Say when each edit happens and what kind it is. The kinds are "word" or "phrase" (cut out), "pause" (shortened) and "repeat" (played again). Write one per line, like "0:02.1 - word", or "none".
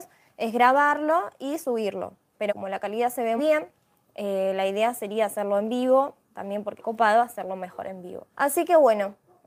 0:02.5 - word
0:03.4 - word
0:06.8 - word
0:08.3 - pause